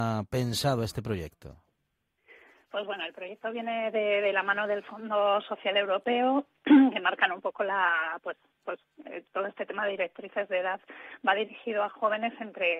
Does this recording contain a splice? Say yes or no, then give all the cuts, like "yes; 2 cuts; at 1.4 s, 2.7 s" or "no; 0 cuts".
no; 0 cuts